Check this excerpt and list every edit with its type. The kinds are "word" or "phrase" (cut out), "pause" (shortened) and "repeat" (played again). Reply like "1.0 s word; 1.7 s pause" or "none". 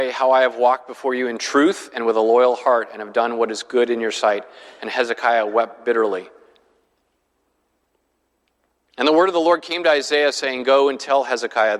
none